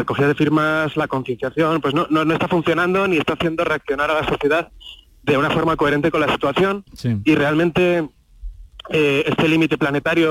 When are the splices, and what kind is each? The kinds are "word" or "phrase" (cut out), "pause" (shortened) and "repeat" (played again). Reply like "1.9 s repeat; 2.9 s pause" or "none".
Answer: 6.9 s pause